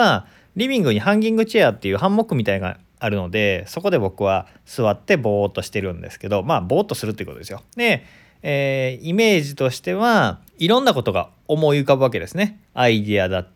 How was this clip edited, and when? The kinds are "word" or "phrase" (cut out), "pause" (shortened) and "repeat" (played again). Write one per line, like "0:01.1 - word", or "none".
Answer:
0:07.7 - pause
0:10.5 - pause
0:12.6 - pause

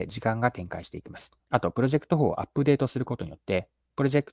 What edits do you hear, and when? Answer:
0:01.4 - pause

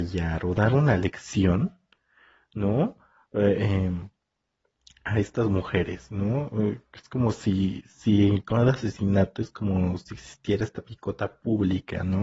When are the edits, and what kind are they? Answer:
none

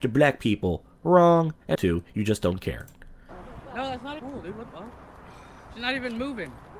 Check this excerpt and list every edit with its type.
0:01.7 - phrase
0:04.2 - word
0:04.7 - word

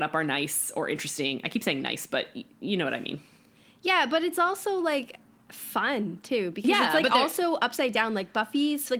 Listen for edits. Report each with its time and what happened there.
none

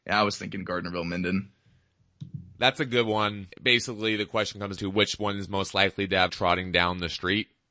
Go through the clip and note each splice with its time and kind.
0:02.5 - pause
0:03.5 - pause
0:04.8 - word
0:06.3 - phrase

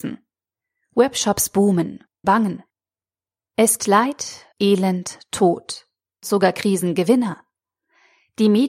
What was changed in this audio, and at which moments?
0:02.2 - word
0:03.8 - word
0:04.5 - pause
0:06.2 - word

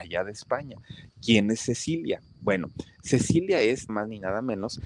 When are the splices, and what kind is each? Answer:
0:03.9 - word

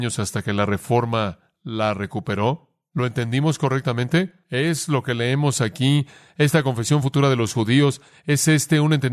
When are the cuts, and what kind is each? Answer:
none

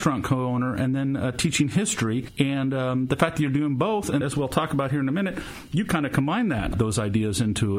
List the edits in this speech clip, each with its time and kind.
0:04.2 - word

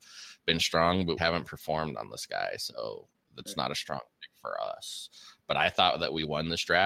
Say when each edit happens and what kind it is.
0:01.2 - word

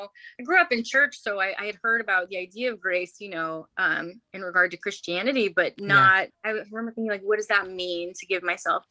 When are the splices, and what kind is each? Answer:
0:04.2 - pause
0:06.3 - pause

